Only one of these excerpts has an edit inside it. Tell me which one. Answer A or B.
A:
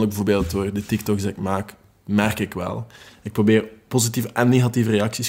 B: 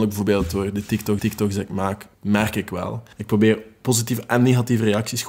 B